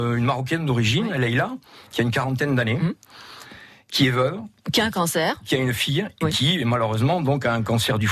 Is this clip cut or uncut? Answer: uncut